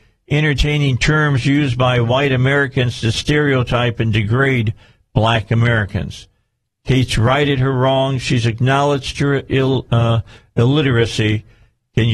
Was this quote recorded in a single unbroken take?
yes; 0 cuts

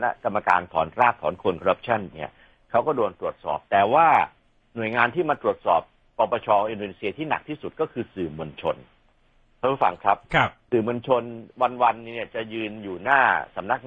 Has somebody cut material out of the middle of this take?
yes; 1 cut; at 2.1 s

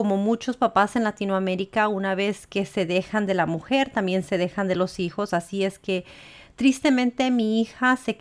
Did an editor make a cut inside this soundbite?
no; 0 cuts

